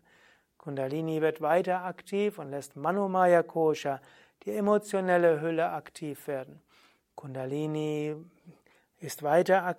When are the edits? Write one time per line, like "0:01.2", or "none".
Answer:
none